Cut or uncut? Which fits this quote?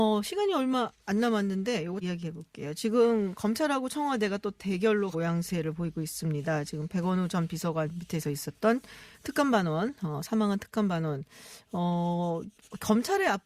cut